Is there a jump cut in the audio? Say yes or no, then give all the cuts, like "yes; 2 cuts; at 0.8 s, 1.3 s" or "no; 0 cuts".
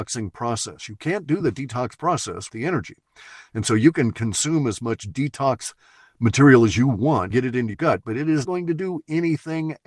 yes; 4 cuts; at 2.5 s, 7.3 s, 7.7 s, 8.4 s